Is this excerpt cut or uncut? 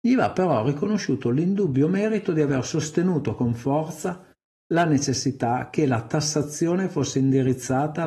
uncut